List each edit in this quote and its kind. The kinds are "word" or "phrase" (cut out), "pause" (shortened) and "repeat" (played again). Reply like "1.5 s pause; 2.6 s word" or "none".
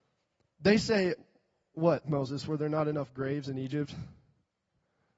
none